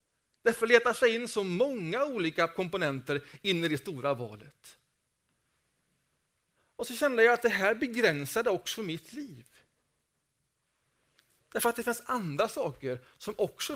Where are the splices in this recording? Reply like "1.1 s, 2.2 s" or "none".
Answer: none